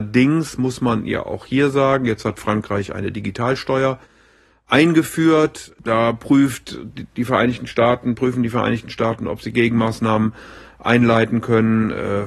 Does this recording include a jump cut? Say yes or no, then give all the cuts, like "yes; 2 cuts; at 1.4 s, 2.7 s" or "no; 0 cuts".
no; 0 cuts